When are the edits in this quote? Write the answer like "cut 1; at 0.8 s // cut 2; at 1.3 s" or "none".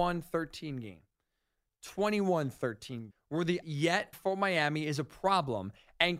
cut 1; at 3.1 s // cut 2; at 3.6 s // cut 3; at 4.1 s